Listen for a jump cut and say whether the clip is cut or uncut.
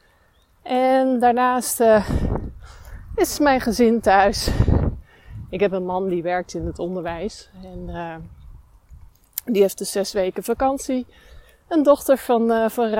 uncut